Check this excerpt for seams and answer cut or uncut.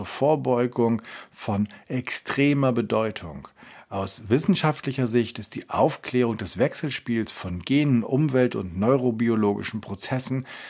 uncut